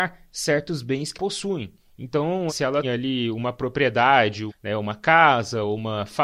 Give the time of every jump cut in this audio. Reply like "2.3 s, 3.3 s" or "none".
1.1 s, 2.5 s, 2.8 s, 4.5 s

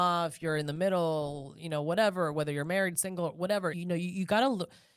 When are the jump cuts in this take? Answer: 3.7 s

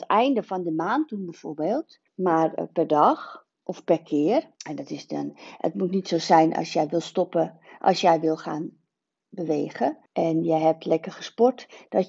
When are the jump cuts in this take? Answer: 2.1 s, 3.5 s, 4.6 s, 10.1 s

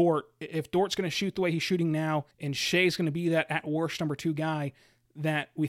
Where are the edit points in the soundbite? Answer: 2.3 s

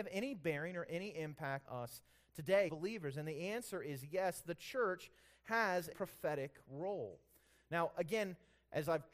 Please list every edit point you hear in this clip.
1.6 s, 2.7 s, 5.9 s

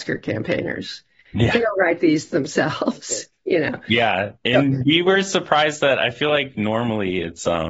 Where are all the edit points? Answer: none

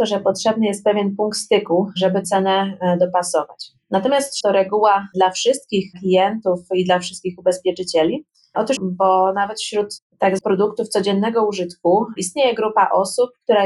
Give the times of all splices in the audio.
2.2 s, 4.4 s, 8.8 s, 10.4 s

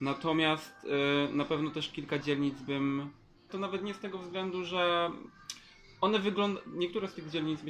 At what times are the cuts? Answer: 3.5 s

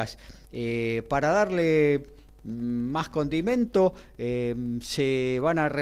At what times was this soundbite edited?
none

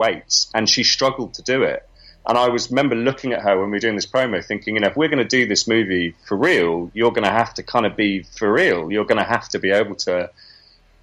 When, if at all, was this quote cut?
none

